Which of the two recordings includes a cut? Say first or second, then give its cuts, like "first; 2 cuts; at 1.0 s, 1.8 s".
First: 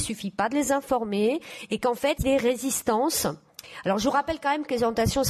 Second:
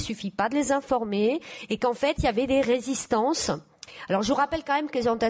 first; 1 cut; at 2.2 s